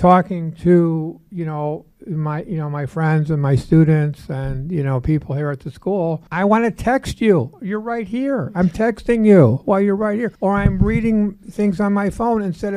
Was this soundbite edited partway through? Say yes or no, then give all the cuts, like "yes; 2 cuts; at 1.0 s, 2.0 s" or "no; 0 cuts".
yes; 3 cuts; at 1.9 s, 6.3 s, 10.3 s